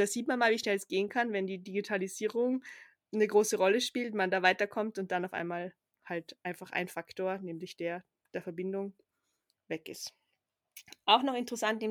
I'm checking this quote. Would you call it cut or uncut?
uncut